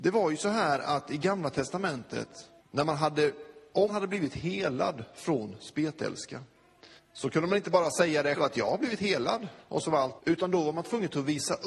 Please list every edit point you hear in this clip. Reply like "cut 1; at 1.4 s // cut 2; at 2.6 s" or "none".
cut 1; at 2.6 s // cut 2; at 3.9 s // cut 3; at 7.0 s // cut 4; at 8.4 s // cut 5; at 9.6 s // cut 6; at 10.2 s